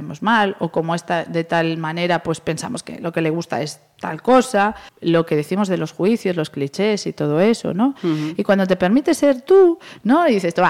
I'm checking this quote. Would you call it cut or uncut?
cut